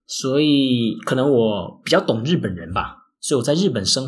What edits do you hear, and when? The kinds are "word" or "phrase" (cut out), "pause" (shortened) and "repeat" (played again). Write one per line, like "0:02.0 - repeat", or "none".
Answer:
none